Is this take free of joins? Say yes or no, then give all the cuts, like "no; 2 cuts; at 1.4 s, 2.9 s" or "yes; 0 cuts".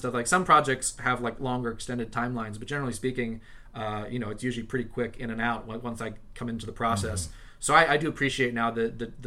yes; 0 cuts